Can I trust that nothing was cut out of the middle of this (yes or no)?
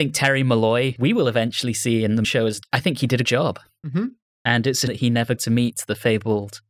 no